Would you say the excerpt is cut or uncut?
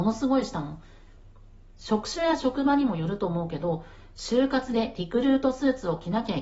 uncut